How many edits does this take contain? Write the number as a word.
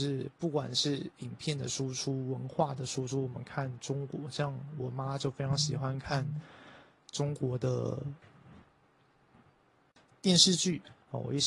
zero